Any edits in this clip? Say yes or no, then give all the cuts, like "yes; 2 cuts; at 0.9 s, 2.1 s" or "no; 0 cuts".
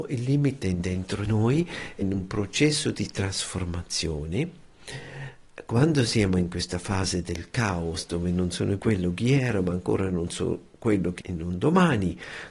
yes; 4 cuts; at 1.3 s, 2.0 s, 8.8 s, 11.2 s